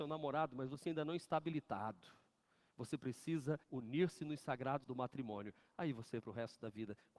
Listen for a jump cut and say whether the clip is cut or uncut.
cut